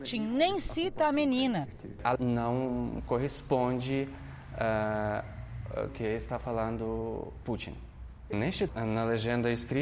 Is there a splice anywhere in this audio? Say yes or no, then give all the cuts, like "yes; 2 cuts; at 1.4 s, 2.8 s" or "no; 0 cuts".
yes; 4 cuts; at 2.2 s, 5.9 s, 7.4 s, 8.7 s